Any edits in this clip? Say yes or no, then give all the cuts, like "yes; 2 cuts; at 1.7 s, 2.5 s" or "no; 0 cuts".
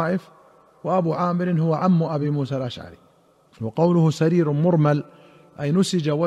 no; 0 cuts